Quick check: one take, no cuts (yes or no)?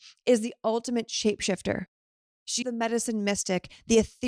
no